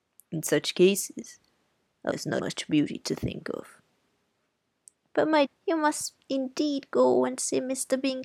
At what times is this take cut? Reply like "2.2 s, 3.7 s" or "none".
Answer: 2.1 s, 2.4 s, 5.4 s